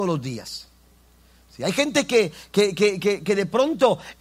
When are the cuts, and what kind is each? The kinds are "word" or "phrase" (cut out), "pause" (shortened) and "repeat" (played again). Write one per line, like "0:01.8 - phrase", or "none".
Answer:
none